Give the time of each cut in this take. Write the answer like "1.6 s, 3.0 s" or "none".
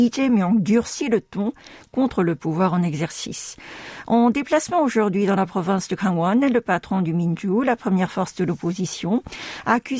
none